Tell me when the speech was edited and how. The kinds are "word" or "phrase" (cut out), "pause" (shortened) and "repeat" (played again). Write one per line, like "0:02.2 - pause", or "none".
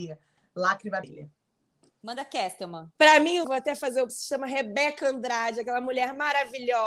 0:01.0 - word
0:02.9 - pause
0:03.4 - word
0:04.1 - word